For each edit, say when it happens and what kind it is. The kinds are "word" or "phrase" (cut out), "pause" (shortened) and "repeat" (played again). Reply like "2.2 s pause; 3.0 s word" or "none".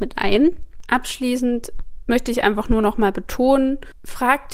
none

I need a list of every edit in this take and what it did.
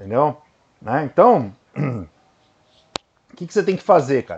none

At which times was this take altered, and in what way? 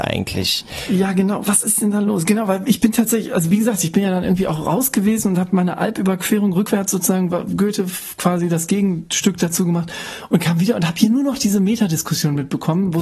none

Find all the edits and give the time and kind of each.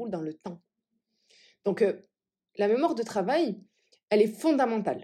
none

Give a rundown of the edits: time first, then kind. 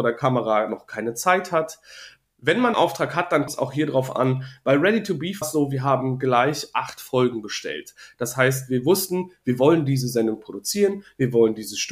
2.7 s word; 3.5 s word; 5.4 s word

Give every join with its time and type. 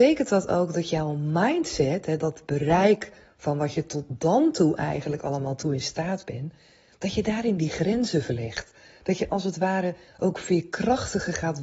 none

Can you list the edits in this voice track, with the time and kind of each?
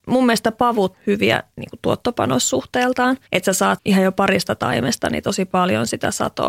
0.9 s phrase; 3.3 s pause; 3.8 s word

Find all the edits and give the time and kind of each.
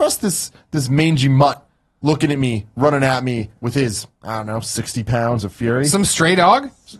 none

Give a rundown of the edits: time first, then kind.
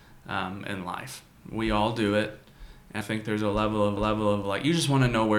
3.0 s word; 4.0 s repeat

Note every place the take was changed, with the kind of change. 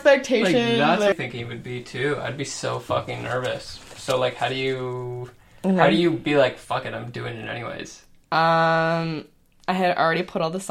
1.1 s phrase

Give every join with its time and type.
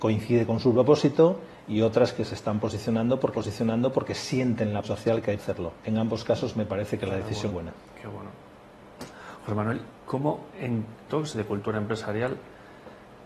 3.3 s repeat; 4.8 s word; 5.4 s word; 5.8 s pause; 7.5 s word; 10.0 s pause; 11.1 s phrase

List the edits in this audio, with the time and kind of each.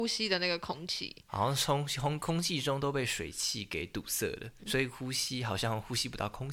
4.6 s word

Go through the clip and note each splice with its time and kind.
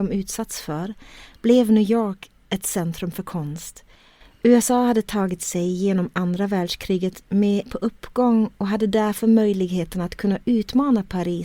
7.7 s word

